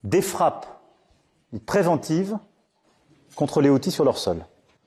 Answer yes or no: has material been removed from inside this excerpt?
no